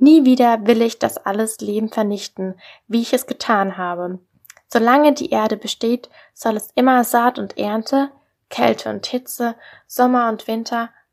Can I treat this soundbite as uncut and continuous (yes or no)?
yes